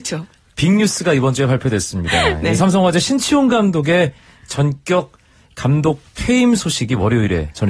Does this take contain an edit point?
no; 0 cuts

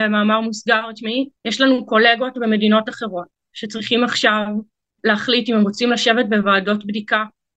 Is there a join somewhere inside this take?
yes; 1 cut; at 1.4 s

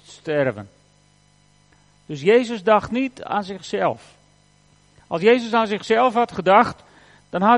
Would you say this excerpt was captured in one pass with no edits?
yes; 0 cuts

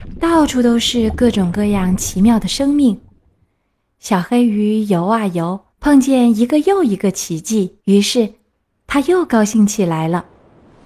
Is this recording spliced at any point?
yes; 2 cuts; at 5.7 s, 7.8 s

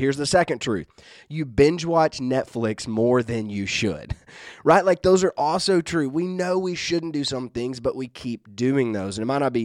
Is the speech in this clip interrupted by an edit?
no; 0 cuts

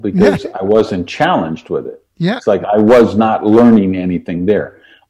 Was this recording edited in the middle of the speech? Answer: no; 0 cuts

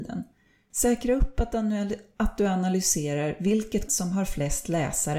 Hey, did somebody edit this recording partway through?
yes; 1 cut; at 3.9 s

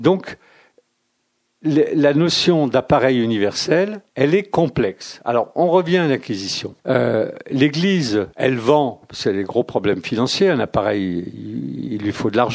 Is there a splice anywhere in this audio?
yes; 3 cuts; at 4.1 s, 6.8 s, 8.3 s

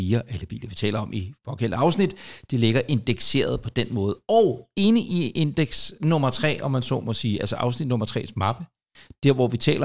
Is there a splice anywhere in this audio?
no; 0 cuts

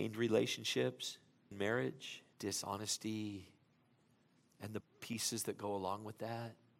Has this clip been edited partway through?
yes; 3 cuts; at 1.5 s, 2.3 s, 4.8 s

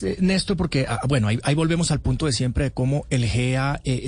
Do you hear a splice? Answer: no; 0 cuts

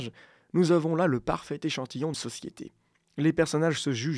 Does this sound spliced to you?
yes; 1 cut; at 2.1 s

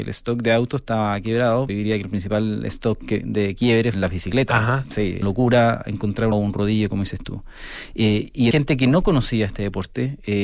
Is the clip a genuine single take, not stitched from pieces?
no; 5 cuts; at 1.7 s, 3.9 s, 5.2 s, 6.3 s, 8.5 s

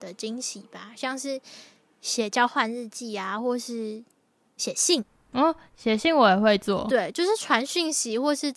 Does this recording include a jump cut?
no; 0 cuts

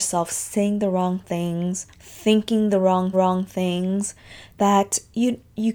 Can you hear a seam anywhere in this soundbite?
yes; 2 cuts; at 1.9 s, 3.1 s

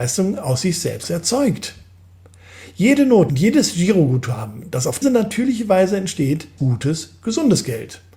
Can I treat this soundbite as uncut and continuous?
no; 4 cuts; at 1.0 s, 3.3 s, 5.0 s, 6.6 s

